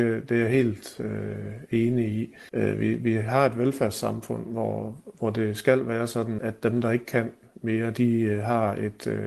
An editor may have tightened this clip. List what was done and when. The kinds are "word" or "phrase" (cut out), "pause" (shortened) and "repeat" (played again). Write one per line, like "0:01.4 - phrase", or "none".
0:02.5 - pause
0:06.4 - word